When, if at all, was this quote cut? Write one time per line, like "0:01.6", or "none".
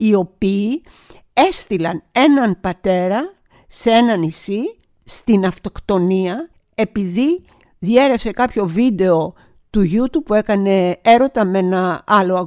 none

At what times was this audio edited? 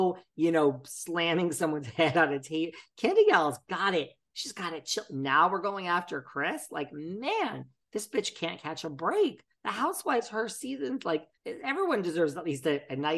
0:11.4

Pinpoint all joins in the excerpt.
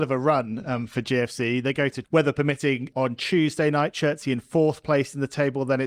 0:02.0
0:02.9

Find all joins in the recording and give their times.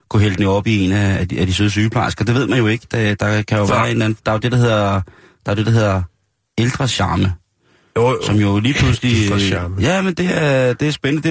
none

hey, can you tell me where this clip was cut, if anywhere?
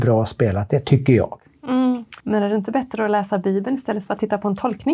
0:02.2

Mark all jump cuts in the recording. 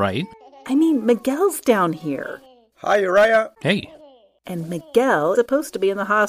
0:03.6
0:05.3

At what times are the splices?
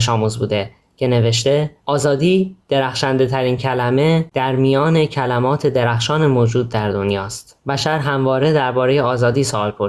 none

